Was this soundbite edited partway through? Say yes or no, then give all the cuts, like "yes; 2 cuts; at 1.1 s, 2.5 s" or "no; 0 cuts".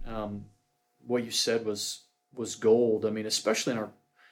no; 0 cuts